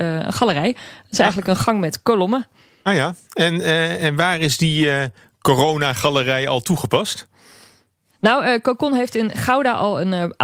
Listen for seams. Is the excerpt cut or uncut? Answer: uncut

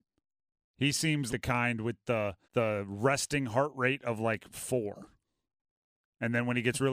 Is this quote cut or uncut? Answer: cut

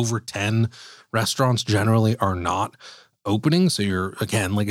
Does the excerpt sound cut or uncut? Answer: uncut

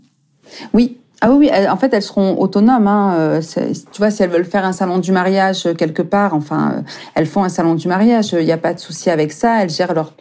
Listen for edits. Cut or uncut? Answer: uncut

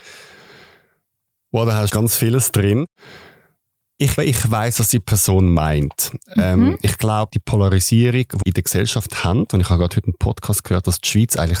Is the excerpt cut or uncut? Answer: cut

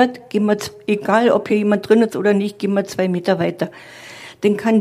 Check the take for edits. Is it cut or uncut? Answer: uncut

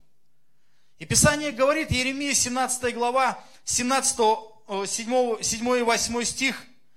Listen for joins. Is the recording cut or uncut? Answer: uncut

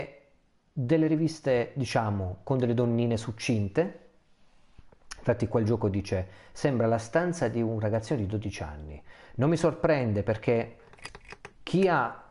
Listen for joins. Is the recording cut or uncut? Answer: uncut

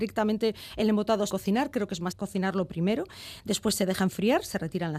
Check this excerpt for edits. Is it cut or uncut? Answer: cut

